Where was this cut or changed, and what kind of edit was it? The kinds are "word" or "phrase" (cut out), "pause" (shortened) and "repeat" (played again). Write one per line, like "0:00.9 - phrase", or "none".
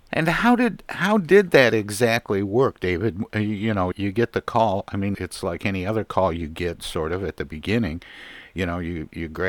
0:03.9 - word
0:05.1 - word